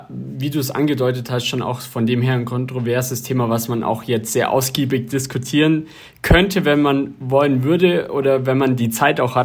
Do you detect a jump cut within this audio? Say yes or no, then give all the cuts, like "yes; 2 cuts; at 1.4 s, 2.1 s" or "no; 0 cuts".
no; 0 cuts